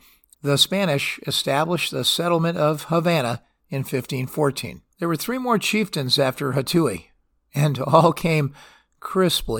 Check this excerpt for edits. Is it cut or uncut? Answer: cut